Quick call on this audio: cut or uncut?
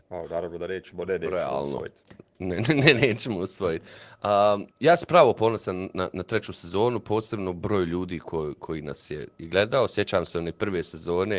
cut